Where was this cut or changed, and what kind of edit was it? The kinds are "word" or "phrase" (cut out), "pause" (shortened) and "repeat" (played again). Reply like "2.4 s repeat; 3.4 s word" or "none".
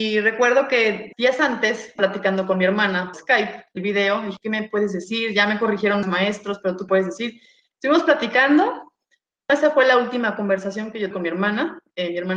1.1 s word; 2.0 s word; 3.1 s word; 3.8 s word; 4.4 s word; 6.0 s word; 6.9 s word; 9.5 s word; 11.1 s word